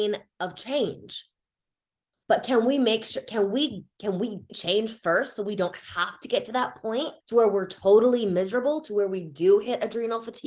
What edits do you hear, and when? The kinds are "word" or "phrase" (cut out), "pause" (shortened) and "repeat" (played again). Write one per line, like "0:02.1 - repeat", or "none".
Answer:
0:04.5 - word
0:07.2 - pause